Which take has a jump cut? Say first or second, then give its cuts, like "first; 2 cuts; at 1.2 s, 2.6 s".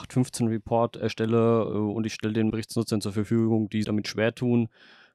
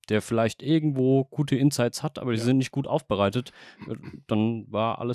first; 2 cuts; at 2.5 s, 3.8 s